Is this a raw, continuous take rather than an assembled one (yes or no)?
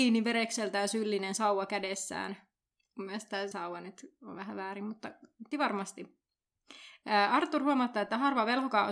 no